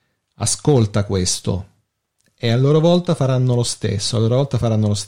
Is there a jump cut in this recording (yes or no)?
no